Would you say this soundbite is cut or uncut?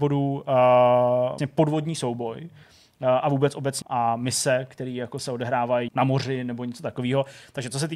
cut